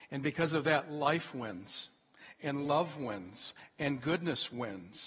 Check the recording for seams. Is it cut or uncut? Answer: uncut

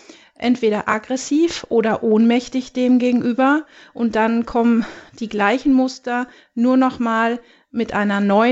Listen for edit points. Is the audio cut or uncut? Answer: uncut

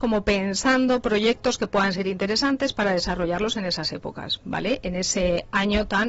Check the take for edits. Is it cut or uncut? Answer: uncut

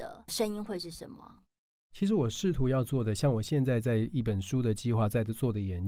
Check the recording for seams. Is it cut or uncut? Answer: uncut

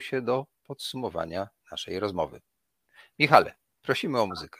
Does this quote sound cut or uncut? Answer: uncut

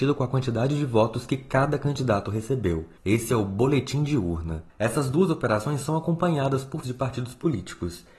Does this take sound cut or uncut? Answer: cut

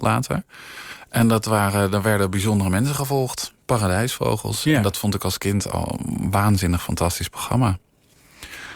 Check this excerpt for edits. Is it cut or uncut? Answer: uncut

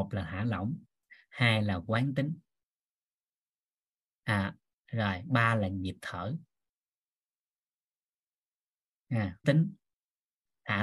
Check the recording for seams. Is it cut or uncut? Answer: cut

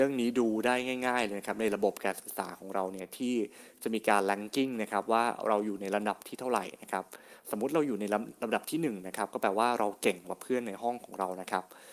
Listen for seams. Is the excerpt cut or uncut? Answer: uncut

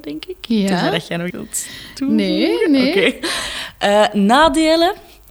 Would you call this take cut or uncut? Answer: cut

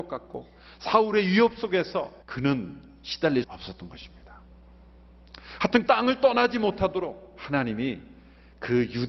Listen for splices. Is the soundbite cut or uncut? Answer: cut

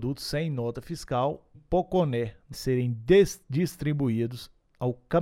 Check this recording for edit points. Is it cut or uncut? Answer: cut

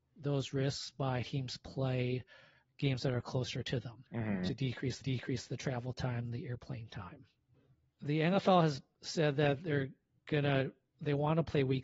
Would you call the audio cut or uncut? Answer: cut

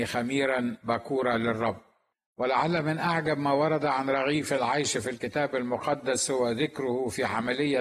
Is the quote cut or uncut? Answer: uncut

